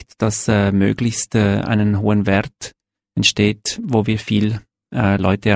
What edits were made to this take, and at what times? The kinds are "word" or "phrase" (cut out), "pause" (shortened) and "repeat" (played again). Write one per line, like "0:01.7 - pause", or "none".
none